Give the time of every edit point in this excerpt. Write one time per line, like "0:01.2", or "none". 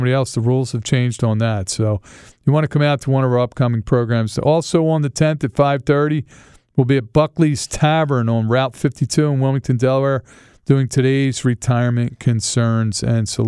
none